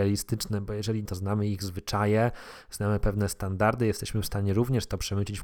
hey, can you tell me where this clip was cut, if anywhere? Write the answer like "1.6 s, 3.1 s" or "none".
1.1 s